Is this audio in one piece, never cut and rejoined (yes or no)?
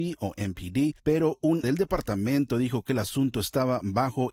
no